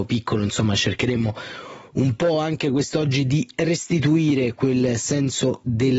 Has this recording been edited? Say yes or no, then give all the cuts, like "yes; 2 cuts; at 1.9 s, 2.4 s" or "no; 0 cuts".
no; 0 cuts